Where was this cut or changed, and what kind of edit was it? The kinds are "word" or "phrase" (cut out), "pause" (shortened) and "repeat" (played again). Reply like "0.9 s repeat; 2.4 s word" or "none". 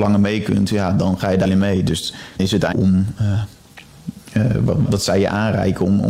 1.4 s word; 2.4 s word; 2.7 s word; 4.9 s word